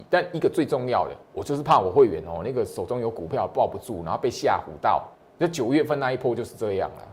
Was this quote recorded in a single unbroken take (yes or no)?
no